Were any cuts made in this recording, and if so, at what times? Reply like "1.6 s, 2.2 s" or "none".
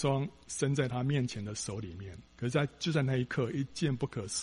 2.3 s